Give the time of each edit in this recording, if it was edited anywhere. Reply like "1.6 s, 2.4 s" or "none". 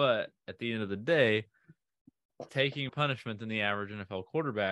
2.5 s, 2.9 s

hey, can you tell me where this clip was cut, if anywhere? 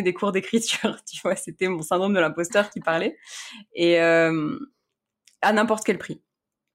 none

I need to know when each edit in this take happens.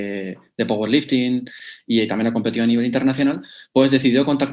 none

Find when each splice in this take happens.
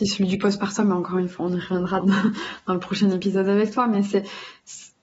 1.4 s, 2.0 s

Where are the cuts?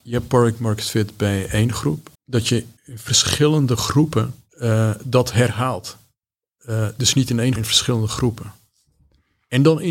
2.1 s, 2.8 s, 4.5 s, 6.2 s, 7.6 s

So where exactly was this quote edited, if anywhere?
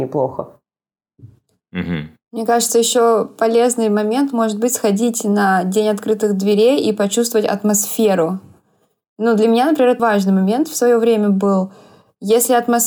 2.2 s, 10.0 s

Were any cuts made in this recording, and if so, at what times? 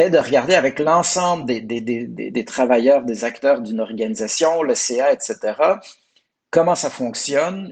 none

